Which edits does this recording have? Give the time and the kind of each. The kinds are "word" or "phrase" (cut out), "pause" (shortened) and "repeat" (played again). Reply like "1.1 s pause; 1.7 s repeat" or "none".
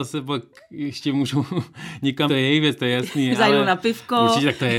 2.3 s word